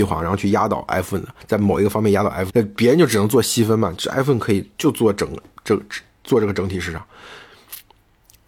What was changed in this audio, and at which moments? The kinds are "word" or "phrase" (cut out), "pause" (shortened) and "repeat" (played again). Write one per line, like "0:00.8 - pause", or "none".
0:02.5 - phrase